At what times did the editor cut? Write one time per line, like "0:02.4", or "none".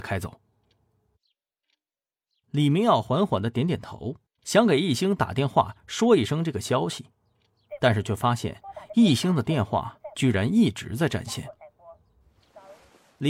0:04.3